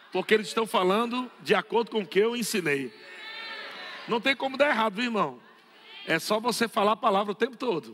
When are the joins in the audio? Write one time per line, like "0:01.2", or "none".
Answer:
none